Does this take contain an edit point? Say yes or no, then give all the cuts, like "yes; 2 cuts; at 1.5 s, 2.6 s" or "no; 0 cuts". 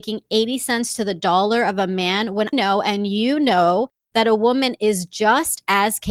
yes; 1 cut; at 2.5 s